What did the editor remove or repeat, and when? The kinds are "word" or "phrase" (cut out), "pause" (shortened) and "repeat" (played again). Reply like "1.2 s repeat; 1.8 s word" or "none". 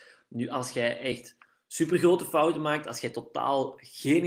none